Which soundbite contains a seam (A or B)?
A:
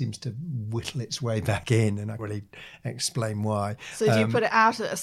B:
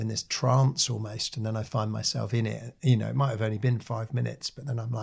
A